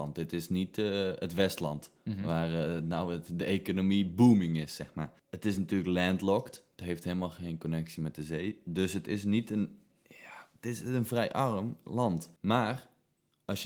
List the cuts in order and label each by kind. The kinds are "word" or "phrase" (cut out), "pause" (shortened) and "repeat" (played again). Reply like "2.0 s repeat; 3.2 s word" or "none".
none